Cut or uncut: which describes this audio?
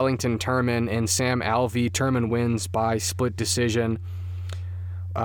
uncut